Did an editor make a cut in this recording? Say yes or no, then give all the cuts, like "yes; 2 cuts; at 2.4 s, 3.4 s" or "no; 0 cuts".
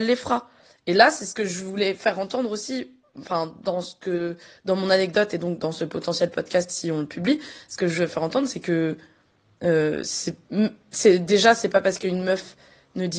no; 0 cuts